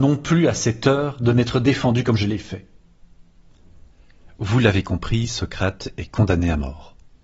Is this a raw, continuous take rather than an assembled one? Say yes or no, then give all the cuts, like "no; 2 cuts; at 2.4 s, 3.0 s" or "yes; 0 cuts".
yes; 0 cuts